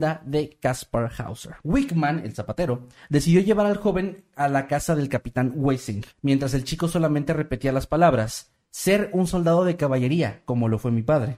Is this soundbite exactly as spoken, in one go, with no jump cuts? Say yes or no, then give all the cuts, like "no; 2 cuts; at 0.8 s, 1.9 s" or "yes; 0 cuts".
no; 2 cuts; at 1.6 s, 6.1 s